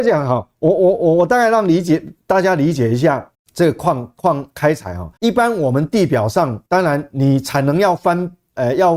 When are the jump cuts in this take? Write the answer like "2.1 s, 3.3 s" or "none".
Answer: 3.3 s, 4.5 s, 5.2 s, 6.7 s